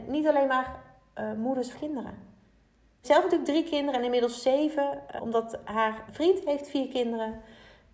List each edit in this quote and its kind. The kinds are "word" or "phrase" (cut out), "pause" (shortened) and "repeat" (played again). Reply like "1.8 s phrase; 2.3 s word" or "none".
1.7 s phrase; 3.0 s word; 5.2 s word; 6.1 s word